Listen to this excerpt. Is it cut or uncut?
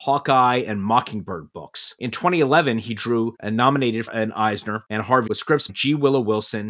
cut